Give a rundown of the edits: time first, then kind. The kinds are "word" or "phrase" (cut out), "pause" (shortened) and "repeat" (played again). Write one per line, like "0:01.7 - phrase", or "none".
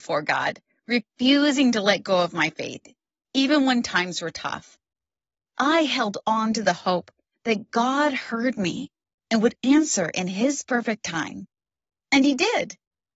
none